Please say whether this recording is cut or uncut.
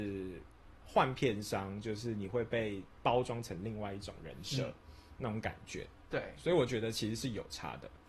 uncut